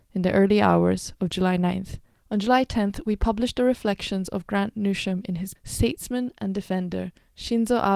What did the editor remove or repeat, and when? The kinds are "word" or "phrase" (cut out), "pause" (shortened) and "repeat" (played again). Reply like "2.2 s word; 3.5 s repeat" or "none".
5.6 s word